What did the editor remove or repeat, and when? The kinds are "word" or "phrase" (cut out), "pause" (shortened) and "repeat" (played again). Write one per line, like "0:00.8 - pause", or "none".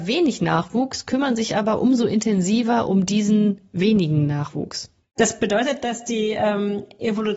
none